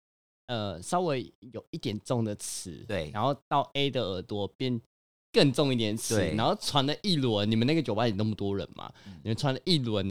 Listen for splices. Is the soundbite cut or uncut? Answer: uncut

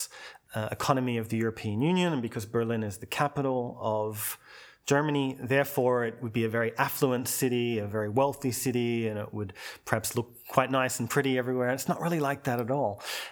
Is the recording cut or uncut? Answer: uncut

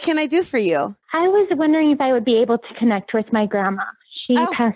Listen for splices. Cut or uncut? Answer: cut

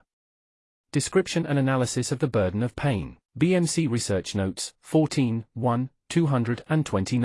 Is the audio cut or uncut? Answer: cut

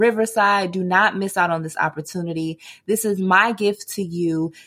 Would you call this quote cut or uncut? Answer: uncut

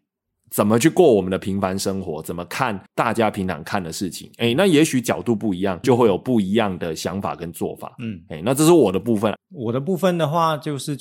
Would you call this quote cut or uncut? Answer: cut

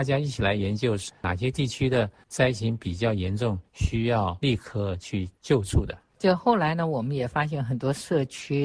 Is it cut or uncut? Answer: cut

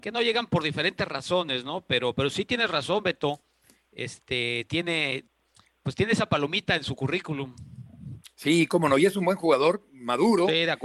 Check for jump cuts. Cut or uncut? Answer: uncut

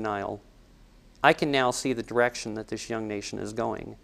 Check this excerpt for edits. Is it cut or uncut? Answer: uncut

